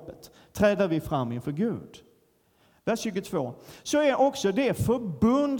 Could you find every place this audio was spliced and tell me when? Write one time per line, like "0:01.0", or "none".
none